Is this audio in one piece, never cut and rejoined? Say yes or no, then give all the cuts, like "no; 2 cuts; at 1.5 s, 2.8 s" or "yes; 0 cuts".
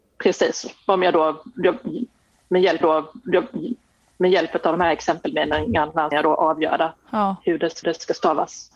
no; 3 cuts; at 2.8 s, 6.1 s, 7.8 s